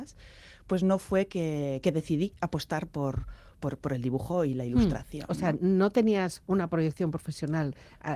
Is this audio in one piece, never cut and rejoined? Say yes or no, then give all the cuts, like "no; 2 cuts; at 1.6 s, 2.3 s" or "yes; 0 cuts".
yes; 0 cuts